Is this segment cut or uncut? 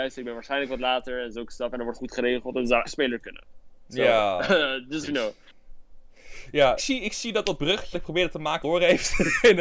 cut